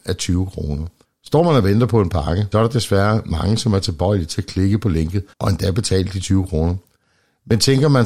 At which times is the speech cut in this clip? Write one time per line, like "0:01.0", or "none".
0:01.0
0:02.5
0:05.3